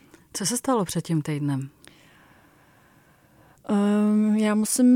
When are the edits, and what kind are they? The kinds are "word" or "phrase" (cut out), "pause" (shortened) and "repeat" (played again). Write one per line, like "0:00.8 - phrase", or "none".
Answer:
none